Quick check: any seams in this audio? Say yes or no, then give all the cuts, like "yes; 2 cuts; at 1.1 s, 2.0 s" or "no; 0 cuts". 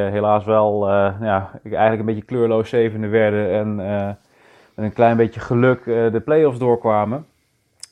no; 0 cuts